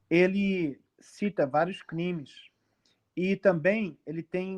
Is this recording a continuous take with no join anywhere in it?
yes; 0 cuts

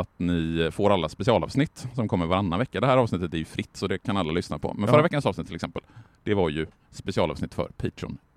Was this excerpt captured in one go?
yes; 0 cuts

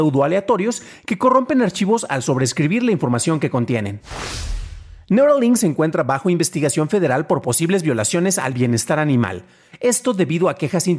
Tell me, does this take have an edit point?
no; 0 cuts

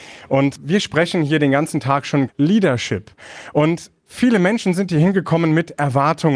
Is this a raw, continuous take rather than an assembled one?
no; 1 cut; at 2.3 s

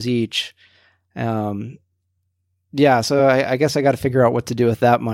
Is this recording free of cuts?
yes; 0 cuts

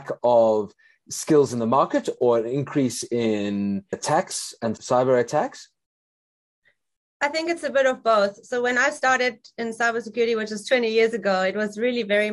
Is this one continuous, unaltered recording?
yes; 0 cuts

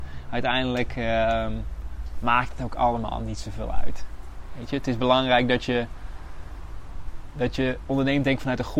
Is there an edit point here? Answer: no; 0 cuts

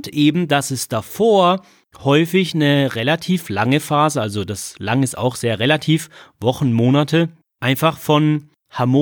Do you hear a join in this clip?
no; 0 cuts

